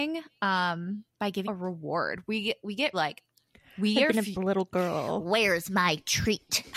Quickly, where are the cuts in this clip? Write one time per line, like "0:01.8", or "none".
0:01.4
0:02.9
0:04.3